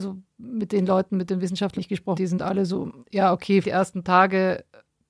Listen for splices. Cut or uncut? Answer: cut